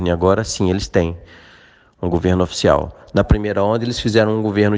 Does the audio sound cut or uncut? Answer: uncut